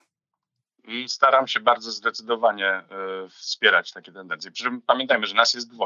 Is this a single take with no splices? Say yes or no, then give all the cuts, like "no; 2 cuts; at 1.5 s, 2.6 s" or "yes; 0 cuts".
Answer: yes; 0 cuts